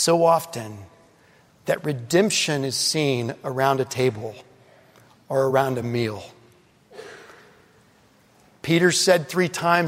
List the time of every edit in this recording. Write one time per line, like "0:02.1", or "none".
none